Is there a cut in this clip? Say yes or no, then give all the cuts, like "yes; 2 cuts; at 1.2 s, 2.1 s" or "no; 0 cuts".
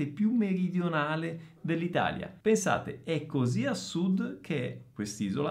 yes; 1 cut; at 2.4 s